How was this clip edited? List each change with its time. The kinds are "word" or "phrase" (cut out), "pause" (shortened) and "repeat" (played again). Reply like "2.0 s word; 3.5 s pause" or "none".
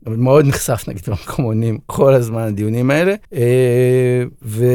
3.2 s pause